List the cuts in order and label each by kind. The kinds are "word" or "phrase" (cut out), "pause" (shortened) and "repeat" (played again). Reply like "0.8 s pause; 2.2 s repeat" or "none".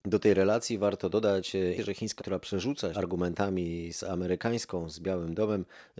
1.8 s word; 2.2 s word; 2.9 s word